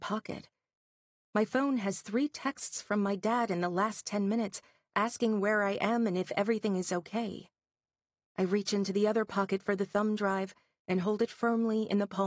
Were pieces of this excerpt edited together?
no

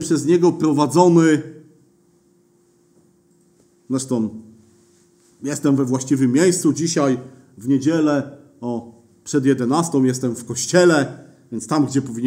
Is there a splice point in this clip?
no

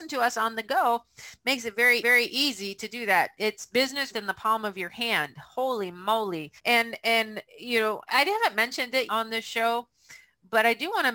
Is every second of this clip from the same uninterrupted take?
no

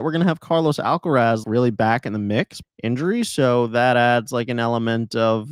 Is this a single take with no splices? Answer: no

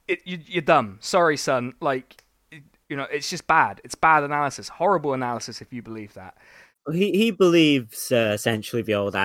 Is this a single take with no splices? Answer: yes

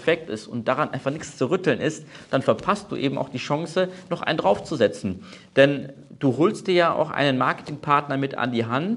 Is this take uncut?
yes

